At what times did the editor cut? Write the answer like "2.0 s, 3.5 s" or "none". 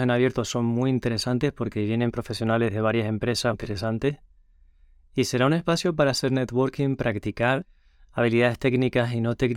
3.5 s

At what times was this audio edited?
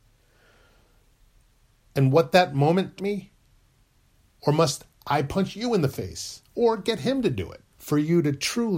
3.0 s, 7.7 s

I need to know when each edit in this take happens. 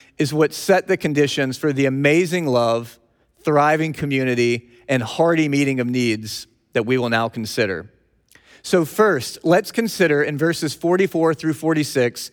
none

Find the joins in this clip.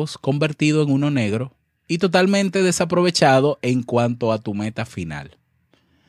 none

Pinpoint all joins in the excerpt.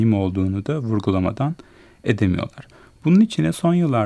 none

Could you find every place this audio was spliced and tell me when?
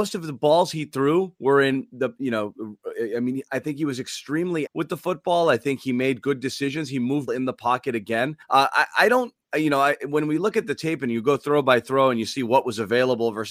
4.7 s, 7.3 s, 8.4 s

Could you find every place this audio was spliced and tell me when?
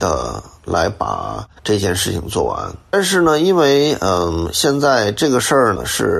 1.6 s

